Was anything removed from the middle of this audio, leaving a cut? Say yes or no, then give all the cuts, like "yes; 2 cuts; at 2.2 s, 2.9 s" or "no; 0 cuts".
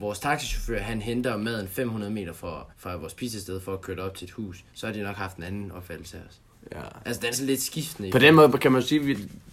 yes; 3 cuts; at 2.7 s, 4.7 s, 7.3 s